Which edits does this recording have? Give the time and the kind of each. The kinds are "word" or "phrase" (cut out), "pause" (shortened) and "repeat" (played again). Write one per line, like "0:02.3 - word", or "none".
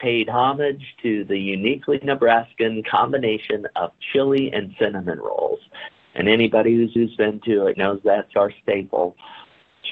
0:07.0 - repeat
0:07.7 - phrase
0:08.3 - word